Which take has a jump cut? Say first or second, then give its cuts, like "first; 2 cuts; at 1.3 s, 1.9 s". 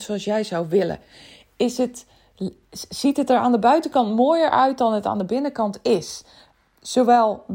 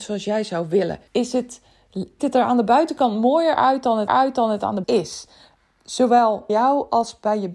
second; 5 cuts; at 1.1 s, 2.2 s, 4.1 s, 4.8 s, 6.5 s